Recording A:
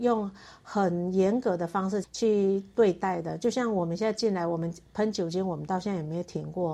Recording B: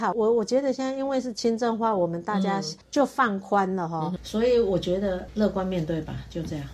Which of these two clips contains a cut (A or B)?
B